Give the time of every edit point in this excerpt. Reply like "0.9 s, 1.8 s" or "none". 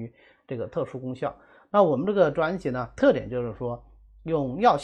3.0 s